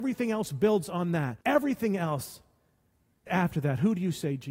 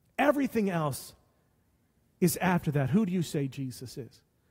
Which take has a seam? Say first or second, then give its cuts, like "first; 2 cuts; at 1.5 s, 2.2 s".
first; 2 cuts; at 1.4 s, 3.3 s